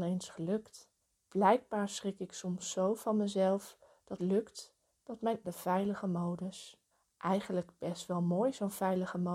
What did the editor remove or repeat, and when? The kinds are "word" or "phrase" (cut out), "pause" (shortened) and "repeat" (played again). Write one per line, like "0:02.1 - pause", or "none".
0:01.0 - pause
0:04.2 - word
0:05.4 - phrase
0:06.9 - pause